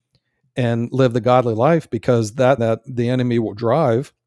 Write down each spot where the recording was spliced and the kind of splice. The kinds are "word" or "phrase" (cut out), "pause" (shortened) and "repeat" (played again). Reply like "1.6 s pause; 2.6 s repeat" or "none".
2.6 s word